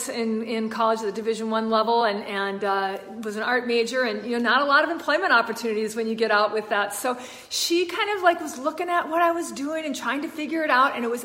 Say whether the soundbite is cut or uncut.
uncut